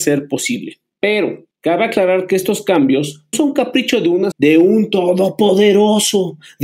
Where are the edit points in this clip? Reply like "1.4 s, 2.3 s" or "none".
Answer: 3.3 s, 4.3 s